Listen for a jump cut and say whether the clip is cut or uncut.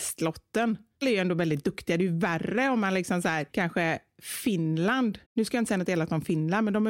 cut